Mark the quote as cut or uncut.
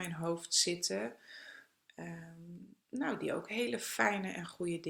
cut